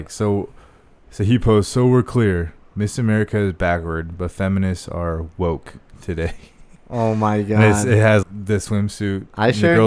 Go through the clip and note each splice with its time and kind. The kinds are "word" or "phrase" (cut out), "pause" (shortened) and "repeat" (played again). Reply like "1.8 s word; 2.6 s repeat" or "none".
8.2 s word